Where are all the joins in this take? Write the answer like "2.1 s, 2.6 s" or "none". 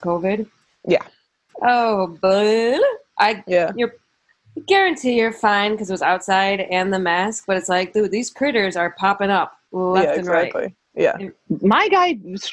none